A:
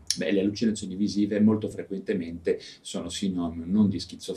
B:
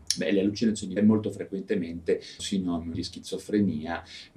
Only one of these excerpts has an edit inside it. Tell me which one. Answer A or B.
B